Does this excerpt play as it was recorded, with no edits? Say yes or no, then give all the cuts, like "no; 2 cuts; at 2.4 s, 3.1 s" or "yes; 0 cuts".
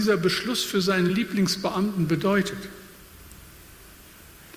yes; 0 cuts